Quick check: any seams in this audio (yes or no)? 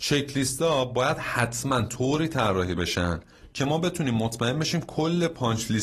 no